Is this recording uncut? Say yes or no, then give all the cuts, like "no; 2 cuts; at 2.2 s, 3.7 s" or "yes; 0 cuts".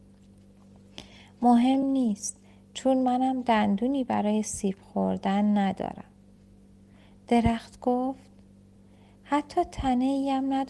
yes; 0 cuts